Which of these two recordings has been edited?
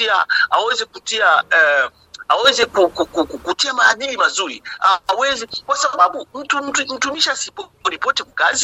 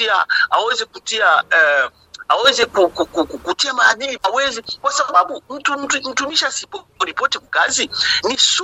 second; 1 cut; at 4.2 s

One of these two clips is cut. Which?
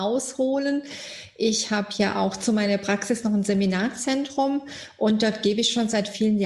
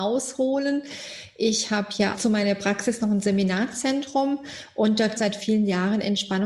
second; 2 cuts; at 2.1 s, 5.2 s

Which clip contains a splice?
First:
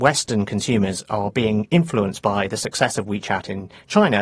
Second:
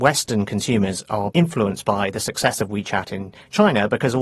second; 1 cut; at 1.3 s

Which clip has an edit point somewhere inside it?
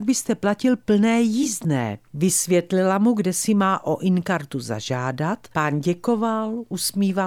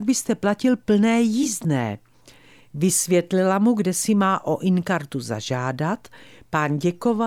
first; 2 cuts; at 2.1 s, 5.5 s

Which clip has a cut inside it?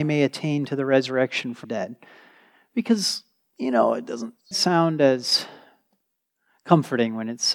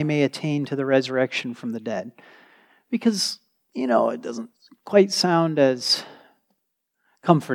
first; 2 cuts; at 1.6 s, 4.5 s

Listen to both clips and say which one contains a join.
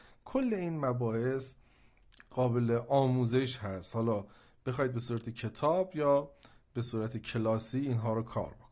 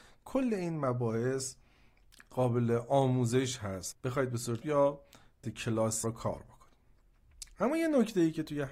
second; 4 cuts; at 3.9 s, 4.6 s, 5.4 s, 6.0 s

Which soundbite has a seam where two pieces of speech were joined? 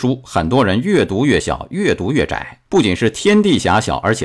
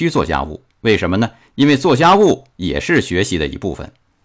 first; 1 cut; at 2.7 s

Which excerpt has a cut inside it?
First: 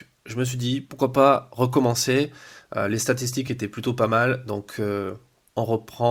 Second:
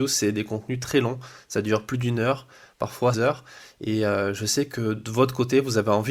second; 2 cuts; at 3.1 s, 5.0 s

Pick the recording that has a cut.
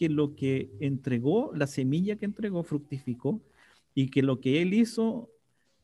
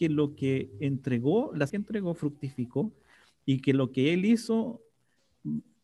second; 1 cut; at 1.7 s

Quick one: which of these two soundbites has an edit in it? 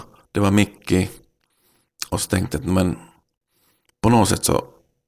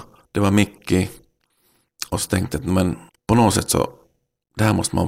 second; 1 cut; at 3.1 s

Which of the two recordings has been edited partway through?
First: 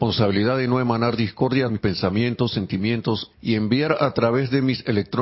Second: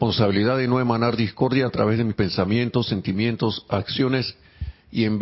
first; 2 cuts; at 1.7 s, 3.3 s

